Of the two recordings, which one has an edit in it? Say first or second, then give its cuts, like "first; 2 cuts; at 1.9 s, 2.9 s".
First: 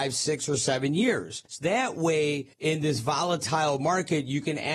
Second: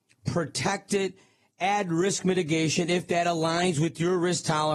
first; 2 cuts; at 1.5 s, 2.5 s